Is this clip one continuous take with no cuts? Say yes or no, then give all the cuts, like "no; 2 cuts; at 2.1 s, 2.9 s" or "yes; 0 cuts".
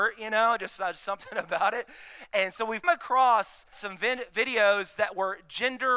no; 2 cuts; at 2.8 s, 3.7 s